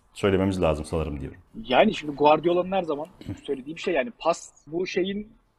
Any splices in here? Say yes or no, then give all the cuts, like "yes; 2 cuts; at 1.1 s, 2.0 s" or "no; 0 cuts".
yes; 2 cuts; at 1.5 s, 4.7 s